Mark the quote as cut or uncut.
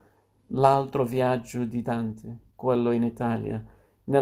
uncut